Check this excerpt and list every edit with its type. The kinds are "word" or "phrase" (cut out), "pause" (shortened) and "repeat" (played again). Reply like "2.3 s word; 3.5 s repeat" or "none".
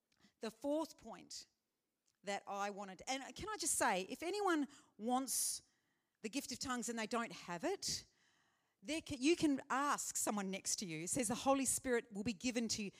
none